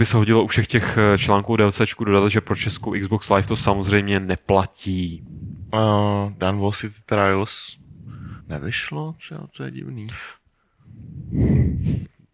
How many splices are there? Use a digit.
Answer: 1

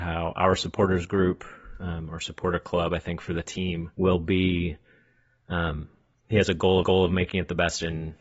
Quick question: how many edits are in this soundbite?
2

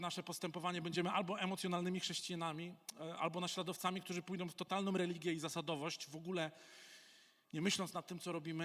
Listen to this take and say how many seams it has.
0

